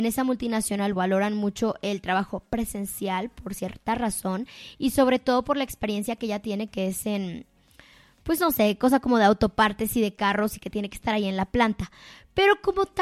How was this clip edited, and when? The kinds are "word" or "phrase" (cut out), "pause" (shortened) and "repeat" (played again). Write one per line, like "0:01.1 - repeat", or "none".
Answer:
0:01.0 - word